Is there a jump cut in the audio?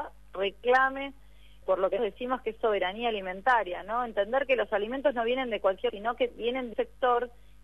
yes; 4 cuts; at 1.6 s, 2.0 s, 5.9 s, 6.7 s

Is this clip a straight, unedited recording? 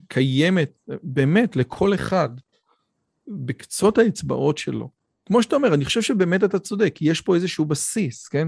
yes; 0 cuts

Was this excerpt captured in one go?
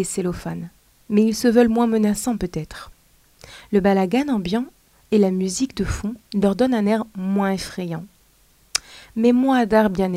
yes; 0 cuts

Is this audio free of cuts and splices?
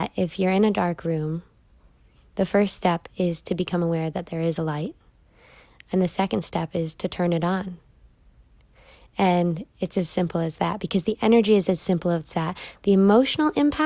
yes; 0 cuts

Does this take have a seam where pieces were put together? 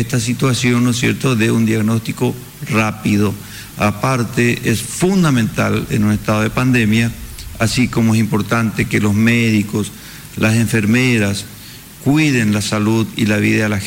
no; 0 cuts

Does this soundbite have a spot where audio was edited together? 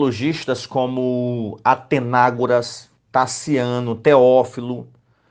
yes; 1 cut; at 3.0 s

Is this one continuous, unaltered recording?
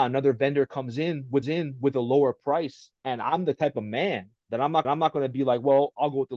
no; 3 cuts; at 1.4 s, 3.0 s, 4.8 s

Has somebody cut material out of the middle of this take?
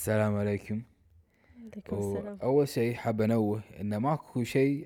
no; 0 cuts

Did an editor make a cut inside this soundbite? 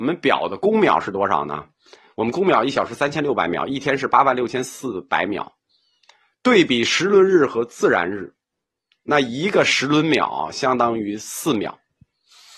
no; 0 cuts

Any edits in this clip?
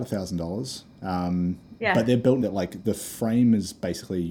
yes; 2 cuts; at 2.4 s, 2.8 s

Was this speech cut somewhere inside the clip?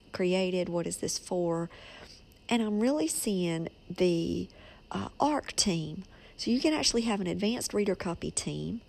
no; 0 cuts

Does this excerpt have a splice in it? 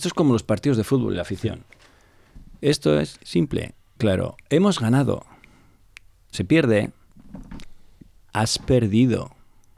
yes; 5 cuts; at 2.6 s, 3.2 s, 4.0 s, 4.4 s, 6.3 s

